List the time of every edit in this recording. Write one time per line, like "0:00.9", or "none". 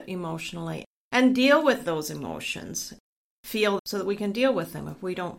0:03.8